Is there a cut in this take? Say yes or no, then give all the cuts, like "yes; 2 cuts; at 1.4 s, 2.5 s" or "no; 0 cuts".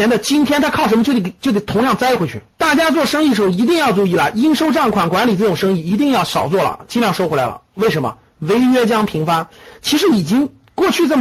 yes; 2 cuts; at 2.5 s, 7.7 s